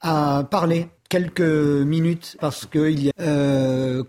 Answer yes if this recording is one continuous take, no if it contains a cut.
no